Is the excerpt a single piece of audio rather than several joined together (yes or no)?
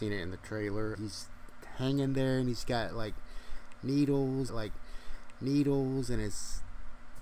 no